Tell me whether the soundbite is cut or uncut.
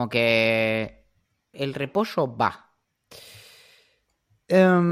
cut